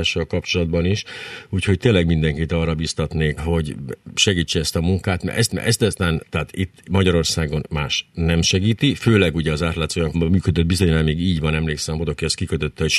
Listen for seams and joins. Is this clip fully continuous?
no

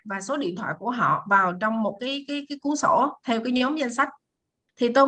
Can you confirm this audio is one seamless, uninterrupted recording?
yes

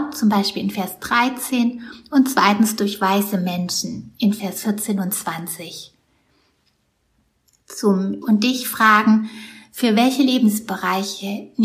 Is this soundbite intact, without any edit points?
no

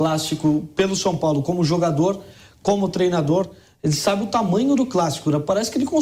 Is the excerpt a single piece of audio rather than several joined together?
yes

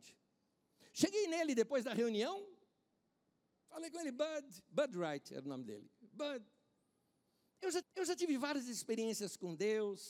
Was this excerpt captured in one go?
no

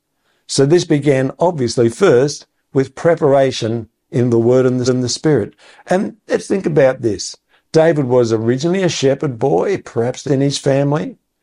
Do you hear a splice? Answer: yes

